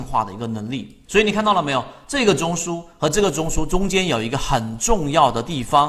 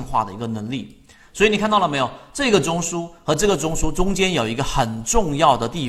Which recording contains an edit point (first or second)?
first